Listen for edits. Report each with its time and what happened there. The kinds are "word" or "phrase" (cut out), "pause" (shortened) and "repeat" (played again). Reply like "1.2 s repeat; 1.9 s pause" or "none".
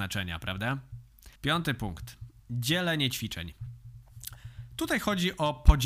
1.4 s pause